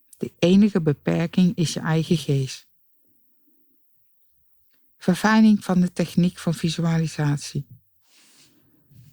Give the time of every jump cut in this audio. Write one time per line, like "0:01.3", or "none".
none